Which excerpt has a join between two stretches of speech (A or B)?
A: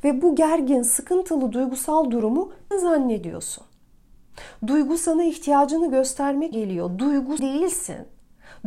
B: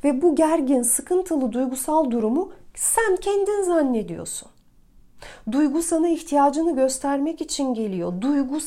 A